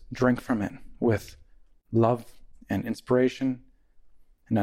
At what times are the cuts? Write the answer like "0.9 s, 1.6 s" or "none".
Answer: none